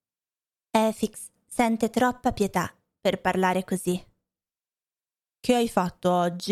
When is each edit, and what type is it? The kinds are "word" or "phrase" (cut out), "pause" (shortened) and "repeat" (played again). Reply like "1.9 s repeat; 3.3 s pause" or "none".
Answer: none